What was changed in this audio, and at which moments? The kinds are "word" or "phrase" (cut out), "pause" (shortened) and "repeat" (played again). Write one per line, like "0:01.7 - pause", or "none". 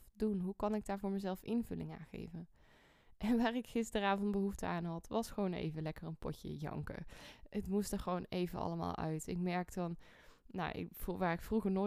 none